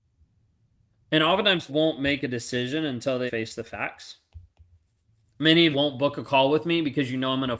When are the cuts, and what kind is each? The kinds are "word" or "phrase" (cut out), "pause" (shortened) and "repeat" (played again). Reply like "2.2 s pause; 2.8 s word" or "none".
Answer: 1.7 s word; 3.3 s word; 4.7 s pause; 5.7 s word